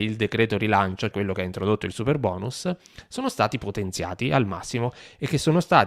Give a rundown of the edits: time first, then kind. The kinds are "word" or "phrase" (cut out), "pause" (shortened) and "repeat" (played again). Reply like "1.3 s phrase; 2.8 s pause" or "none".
1.1 s word